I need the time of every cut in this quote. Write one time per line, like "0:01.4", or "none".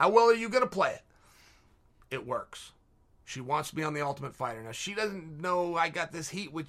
none